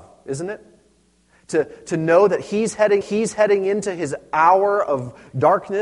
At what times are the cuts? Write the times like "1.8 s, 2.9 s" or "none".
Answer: 3.0 s